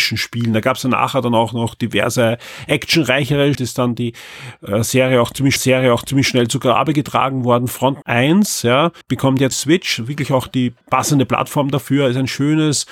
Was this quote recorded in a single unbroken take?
no; 6 cuts; at 3.5 s, 5.6 s, 8.0 s, 9.0 s, 9.5 s, 10.8 s

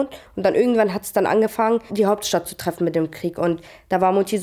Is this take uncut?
no; 1 cut; at 1.9 s

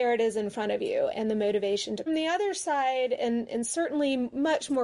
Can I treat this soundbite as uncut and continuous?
no; 2 cuts; at 1.1 s, 2.1 s

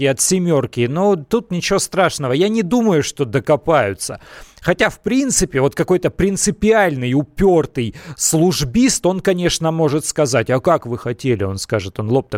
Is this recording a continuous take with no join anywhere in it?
yes; 0 cuts

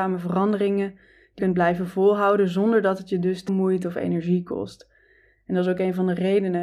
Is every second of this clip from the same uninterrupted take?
no; 2 cuts; at 1.4 s, 3.5 s

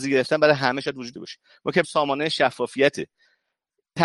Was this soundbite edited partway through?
yes; 2 cuts; at 1.1 s, 1.8 s

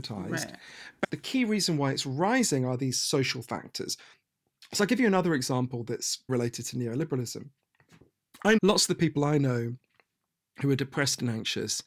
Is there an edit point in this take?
yes; 3 cuts; at 1.0 s, 6.3 s, 8.6 s

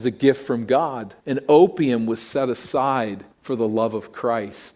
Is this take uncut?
no; 2 cuts; at 1.2 s, 3.3 s

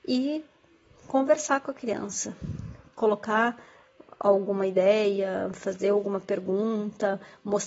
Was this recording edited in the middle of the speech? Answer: no; 0 cuts

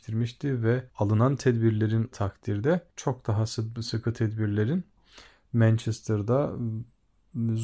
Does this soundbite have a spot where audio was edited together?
yes; 2 cuts; at 2.1 s, 2.9 s

